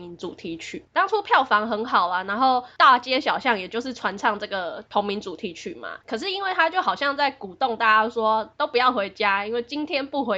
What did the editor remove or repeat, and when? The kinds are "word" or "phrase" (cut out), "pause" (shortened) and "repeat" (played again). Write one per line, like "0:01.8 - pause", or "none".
0:06.0 - pause